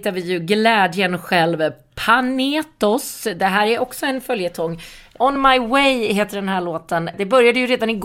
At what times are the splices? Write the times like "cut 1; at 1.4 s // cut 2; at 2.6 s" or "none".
none